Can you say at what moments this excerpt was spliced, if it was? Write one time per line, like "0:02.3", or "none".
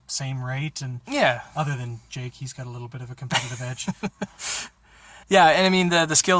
0:05.2